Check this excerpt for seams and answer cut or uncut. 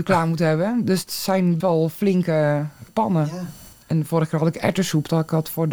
cut